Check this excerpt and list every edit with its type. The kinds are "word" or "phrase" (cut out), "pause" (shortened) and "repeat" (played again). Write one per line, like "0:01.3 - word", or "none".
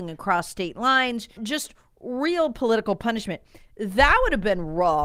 0:01.4 - word